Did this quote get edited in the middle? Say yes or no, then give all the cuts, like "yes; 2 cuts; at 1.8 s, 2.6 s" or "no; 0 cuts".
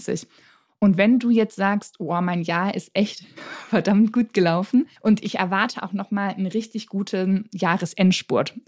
yes; 1 cut; at 5.0 s